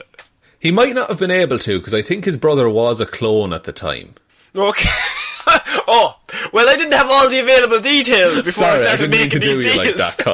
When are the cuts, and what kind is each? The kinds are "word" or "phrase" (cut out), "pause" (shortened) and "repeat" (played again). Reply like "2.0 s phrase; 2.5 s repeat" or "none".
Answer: 4.3 s pause